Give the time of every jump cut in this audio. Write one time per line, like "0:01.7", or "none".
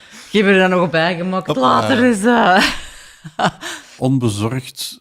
0:00.9
0:04.0